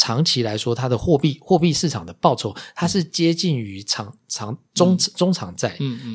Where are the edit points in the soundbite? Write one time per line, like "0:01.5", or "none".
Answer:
0:04.7